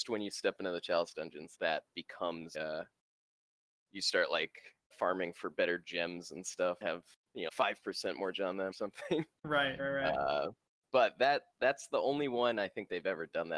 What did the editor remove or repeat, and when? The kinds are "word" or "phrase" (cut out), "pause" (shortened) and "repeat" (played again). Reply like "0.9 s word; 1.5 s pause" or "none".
1.5 s word; 2.5 s word; 4.9 s word; 6.8 s word; 7.5 s word; 8.3 s word; 8.7 s word; 9.8 s word